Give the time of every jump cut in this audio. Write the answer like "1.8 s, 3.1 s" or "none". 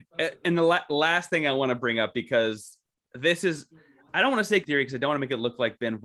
4.6 s